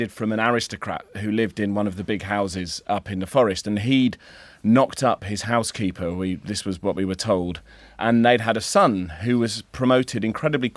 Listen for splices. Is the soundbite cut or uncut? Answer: uncut